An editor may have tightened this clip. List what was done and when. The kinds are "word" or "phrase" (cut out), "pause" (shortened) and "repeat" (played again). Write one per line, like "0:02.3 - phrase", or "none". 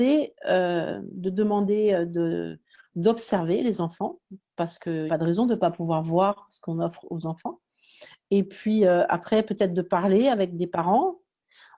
0:05.1 - phrase